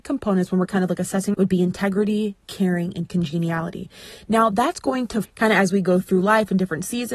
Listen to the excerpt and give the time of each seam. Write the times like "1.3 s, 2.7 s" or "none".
1.3 s, 5.2 s